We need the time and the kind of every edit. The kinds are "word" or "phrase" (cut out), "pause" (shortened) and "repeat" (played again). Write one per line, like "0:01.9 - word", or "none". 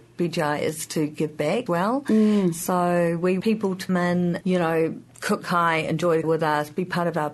0:01.7 - word
0:03.4 - word
0:03.9 - word
0:04.4 - word
0:05.4 - word
0:06.2 - word